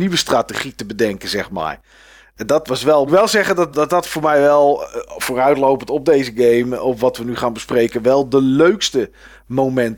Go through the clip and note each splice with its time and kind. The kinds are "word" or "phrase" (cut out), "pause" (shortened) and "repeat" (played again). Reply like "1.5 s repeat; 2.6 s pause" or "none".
3.1 s word; 3.7 s word